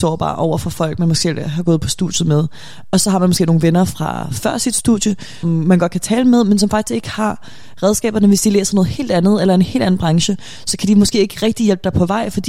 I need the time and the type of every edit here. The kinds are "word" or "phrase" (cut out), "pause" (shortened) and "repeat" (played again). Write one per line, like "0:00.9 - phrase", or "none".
0:05.4 - word